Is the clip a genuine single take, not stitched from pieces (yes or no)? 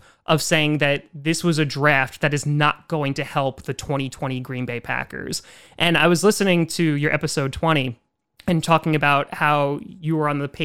yes